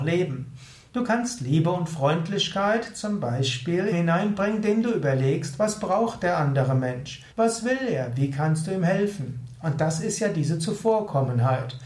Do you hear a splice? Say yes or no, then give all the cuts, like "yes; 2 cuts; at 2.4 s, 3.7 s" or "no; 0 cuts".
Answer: yes; 2 cuts; at 3.9 s, 7.3 s